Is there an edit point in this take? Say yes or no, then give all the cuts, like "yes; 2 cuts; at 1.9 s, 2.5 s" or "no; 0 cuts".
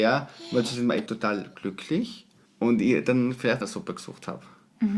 yes; 3 cuts; at 1.1 s, 2.5 s, 3.6 s